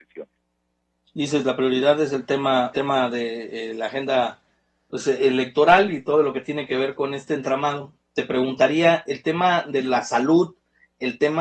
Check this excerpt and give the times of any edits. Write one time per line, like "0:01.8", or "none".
0:02.7